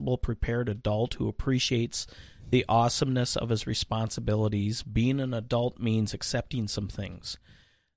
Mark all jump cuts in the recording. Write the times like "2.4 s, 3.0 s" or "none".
none